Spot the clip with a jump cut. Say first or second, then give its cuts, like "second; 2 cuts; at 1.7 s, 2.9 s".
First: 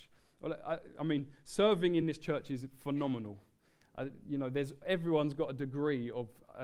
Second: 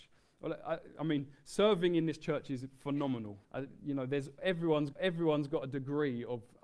second; 2 cuts; at 3.4 s, 4.9 s